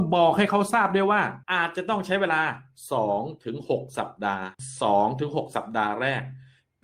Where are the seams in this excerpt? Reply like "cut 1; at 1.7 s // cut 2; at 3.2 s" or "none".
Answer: cut 1; at 1.4 s // cut 2; at 4.5 s

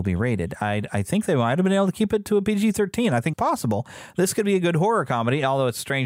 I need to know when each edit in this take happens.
cut 1; at 3.3 s

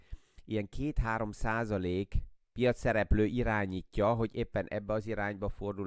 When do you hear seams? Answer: cut 1; at 2.4 s

